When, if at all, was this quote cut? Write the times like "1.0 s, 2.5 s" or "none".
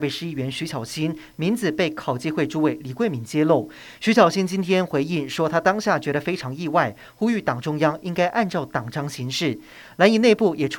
none

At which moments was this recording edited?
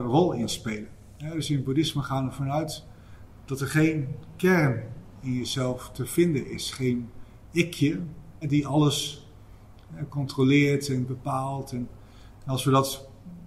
8.4 s

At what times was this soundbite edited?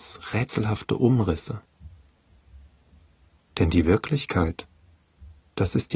none

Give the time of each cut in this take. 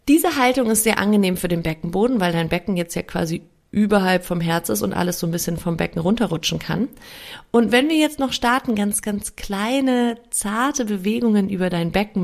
none

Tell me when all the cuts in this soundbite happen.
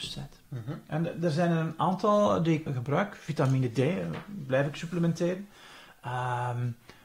2.7 s

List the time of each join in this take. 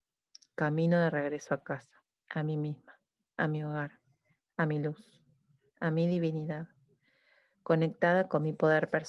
2.1 s

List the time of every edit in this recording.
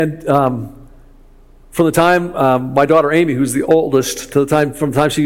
none

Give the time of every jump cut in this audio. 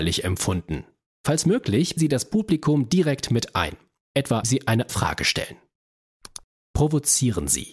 2.0 s, 4.4 s, 4.9 s

